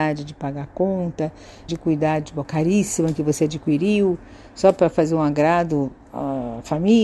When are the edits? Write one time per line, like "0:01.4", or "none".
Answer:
0:01.7
0:02.4